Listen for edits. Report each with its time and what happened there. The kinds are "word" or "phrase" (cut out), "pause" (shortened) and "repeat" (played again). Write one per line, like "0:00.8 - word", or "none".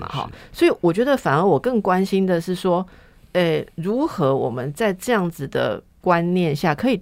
none